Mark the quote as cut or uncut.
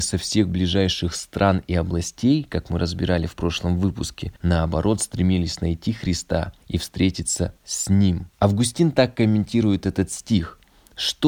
cut